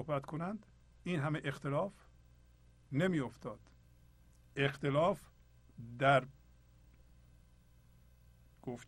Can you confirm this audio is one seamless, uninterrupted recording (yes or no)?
no